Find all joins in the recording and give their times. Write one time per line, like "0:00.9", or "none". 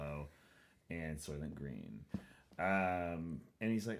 none